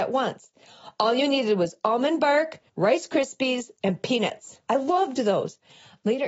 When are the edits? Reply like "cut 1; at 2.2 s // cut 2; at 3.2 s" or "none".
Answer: cut 1; at 2.7 s // cut 2; at 4.6 s

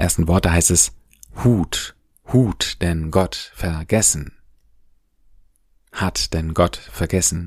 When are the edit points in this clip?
none

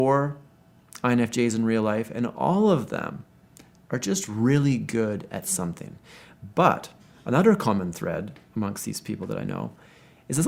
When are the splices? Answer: none

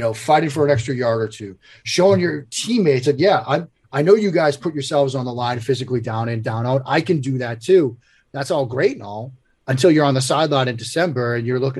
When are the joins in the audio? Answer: none

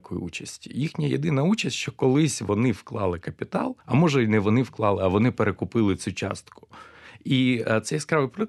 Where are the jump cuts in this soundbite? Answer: cut 1; at 3.8 s

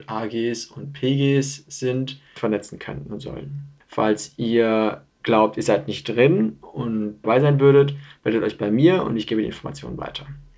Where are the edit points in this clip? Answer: cut 1; at 2.4 s // cut 2; at 3.8 s // cut 3; at 5.1 s // cut 4; at 7.2 s

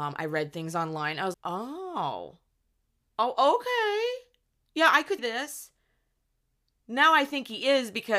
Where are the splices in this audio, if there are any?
cut 1; at 1.3 s // cut 2; at 5.2 s

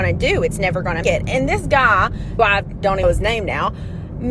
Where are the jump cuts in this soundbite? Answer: cut 1; at 1.0 s // cut 2; at 2.4 s // cut 3; at 3.0 s

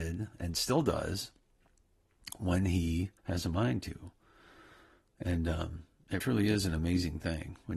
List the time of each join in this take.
cut 1; at 3.2 s // cut 2; at 6.2 s

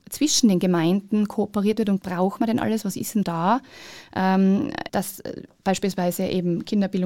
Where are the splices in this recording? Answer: cut 1; at 2.0 s // cut 2; at 3.2 s // cut 3; at 4.9 s

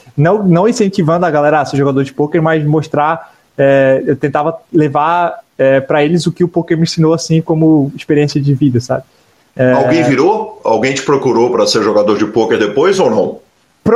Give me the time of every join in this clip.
none

